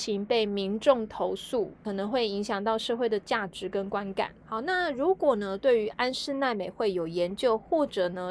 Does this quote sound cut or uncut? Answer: cut